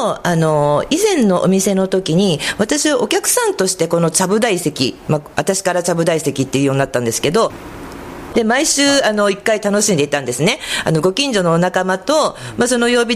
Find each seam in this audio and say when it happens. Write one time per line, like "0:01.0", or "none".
none